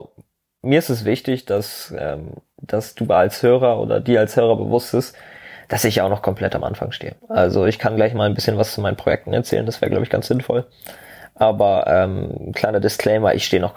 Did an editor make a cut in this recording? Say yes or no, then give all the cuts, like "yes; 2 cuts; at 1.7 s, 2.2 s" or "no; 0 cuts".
yes; 1 cut; at 7.2 s